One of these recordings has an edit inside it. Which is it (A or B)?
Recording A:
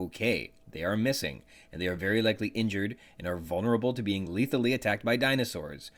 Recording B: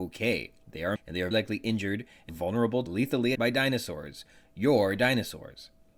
B